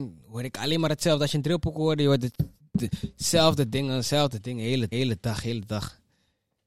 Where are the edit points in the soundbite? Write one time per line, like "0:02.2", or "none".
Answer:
0:02.6
0:04.9